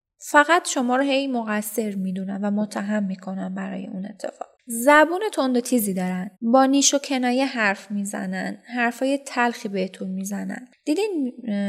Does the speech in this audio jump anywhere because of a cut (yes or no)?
yes